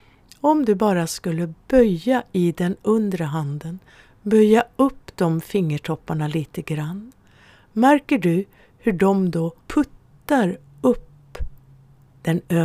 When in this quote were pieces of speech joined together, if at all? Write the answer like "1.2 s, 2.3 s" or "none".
9.6 s